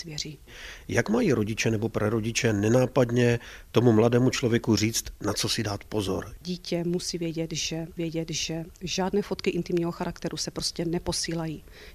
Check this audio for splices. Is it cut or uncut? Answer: cut